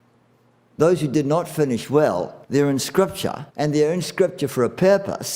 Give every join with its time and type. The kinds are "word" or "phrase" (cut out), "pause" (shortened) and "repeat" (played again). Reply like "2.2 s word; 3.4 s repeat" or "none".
2.4 s pause; 3.5 s pause